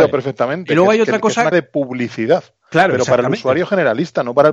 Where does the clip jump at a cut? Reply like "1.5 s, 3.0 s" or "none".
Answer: 1.5 s